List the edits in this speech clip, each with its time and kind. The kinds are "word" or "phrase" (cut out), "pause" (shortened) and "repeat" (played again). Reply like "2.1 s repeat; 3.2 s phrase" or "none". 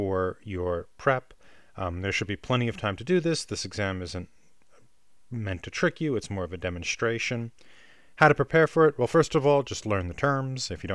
none